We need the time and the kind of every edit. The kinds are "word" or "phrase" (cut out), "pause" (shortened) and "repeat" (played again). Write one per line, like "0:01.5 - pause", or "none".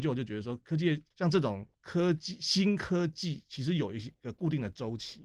0:01.1 - pause
0:01.7 - pause